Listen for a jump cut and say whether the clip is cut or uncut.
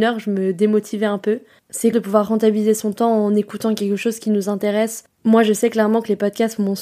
cut